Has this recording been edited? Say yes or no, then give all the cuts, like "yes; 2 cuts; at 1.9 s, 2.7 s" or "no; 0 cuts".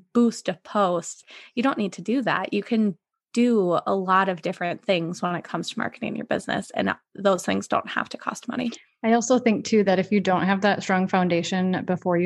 no; 0 cuts